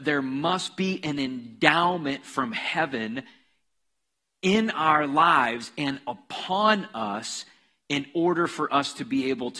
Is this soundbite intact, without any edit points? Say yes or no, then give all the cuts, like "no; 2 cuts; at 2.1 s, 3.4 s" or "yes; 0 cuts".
yes; 0 cuts